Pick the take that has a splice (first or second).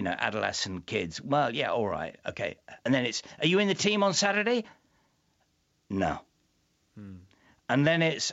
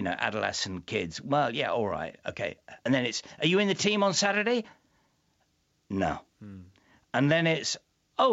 second